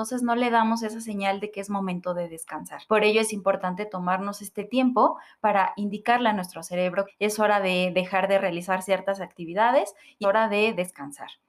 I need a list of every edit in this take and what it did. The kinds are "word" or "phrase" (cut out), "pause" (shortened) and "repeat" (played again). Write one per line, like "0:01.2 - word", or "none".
0:02.9 - pause
0:07.1 - phrase
0:10.2 - word